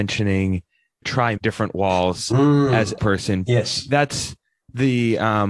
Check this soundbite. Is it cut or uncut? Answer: cut